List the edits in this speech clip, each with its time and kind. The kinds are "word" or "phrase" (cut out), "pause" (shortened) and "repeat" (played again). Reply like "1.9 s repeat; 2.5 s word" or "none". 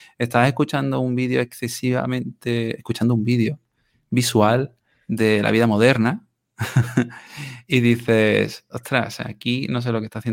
none